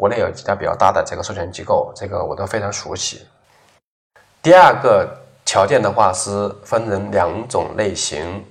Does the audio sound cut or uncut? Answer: uncut